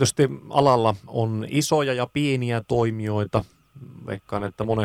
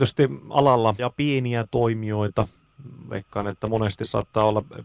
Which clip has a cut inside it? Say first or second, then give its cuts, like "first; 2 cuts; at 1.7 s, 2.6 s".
second; 1 cut; at 1.0 s